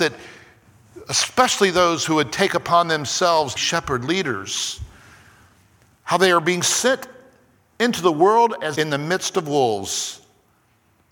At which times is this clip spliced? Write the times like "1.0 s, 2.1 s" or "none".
3.6 s, 8.7 s